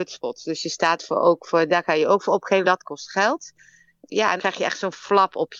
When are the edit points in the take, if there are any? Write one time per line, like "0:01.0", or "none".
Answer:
0:01.0
0:02.6
0:04.4